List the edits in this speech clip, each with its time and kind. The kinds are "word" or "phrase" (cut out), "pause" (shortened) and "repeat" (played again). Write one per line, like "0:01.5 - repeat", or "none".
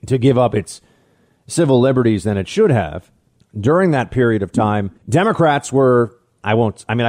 0:05.0 - pause